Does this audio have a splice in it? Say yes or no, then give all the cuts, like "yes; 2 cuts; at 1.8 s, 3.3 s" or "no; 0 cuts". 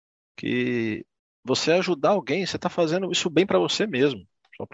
no; 0 cuts